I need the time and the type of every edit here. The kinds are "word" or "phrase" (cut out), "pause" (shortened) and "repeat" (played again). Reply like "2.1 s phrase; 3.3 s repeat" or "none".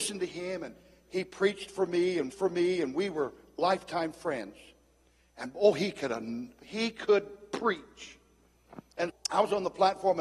2.3 s repeat; 9.1 s word